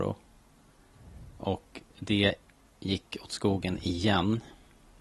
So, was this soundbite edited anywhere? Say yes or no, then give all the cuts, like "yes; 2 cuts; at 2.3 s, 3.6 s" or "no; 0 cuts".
yes; 1 cut; at 1.9 s